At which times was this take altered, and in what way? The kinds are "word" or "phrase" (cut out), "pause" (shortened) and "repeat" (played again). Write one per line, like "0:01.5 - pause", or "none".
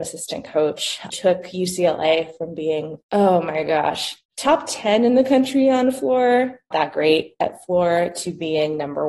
0:01.1 - word
0:03.0 - pause
0:04.2 - pause
0:06.7 - phrase